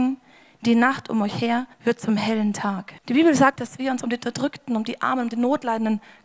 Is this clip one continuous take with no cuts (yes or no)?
no